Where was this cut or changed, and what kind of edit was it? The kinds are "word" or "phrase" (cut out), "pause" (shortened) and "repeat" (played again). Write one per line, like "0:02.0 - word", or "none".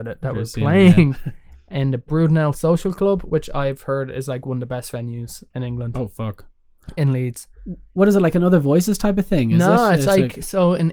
none